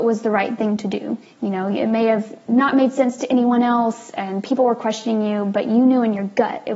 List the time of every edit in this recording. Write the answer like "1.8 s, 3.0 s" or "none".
1.2 s

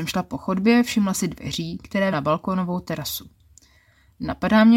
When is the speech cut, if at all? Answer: 1.1 s, 2.1 s

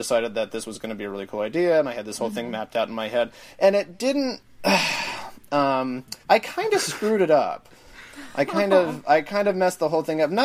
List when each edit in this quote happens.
6.2 s

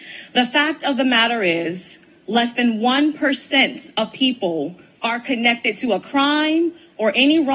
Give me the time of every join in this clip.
none

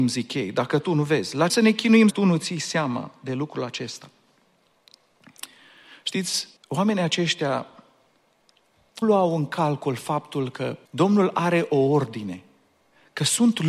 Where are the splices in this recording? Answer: 1.5 s, 2.1 s, 6.6 s, 9.0 s, 10.9 s

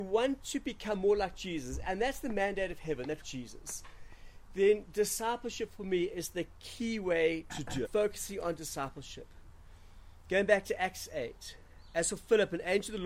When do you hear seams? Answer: 3.2 s, 7.5 s, 7.8 s

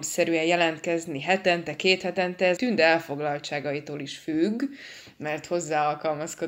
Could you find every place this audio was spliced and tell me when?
2.6 s

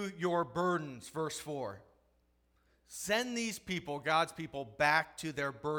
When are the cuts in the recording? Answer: none

